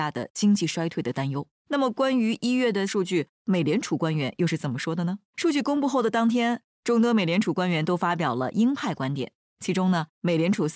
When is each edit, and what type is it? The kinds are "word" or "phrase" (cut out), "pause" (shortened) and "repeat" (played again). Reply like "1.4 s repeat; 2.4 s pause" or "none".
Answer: 1.5 s pause; 2.9 s word; 5.3 s pause